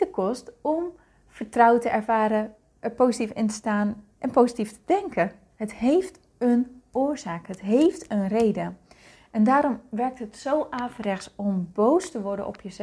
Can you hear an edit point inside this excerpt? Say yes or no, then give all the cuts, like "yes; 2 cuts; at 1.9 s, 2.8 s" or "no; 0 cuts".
no; 0 cuts